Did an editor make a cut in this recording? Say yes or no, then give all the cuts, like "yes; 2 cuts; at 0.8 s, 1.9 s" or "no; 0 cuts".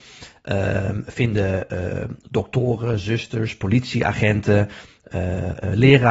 no; 0 cuts